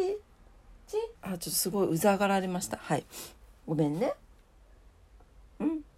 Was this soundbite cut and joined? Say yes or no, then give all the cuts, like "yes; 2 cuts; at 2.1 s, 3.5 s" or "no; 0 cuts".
yes; 1 cut; at 1.2 s